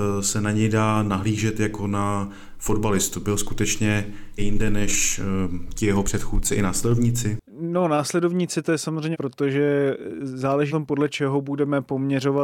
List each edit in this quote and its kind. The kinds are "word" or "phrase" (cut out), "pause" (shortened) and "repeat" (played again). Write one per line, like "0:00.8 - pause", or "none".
0:04.4 - word
0:07.5 - pause
0:09.1 - word
0:10.7 - word